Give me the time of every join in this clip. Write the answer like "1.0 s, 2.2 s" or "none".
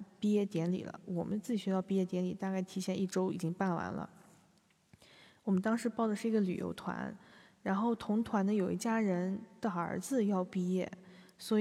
none